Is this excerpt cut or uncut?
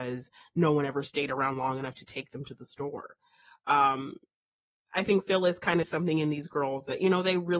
cut